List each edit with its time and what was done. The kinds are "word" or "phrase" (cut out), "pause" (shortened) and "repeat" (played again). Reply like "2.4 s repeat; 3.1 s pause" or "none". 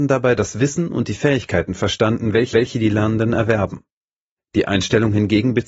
2.5 s repeat